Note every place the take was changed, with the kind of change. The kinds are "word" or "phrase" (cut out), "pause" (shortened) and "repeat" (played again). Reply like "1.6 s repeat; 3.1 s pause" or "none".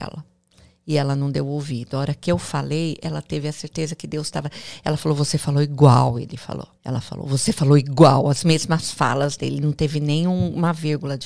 6.8 s pause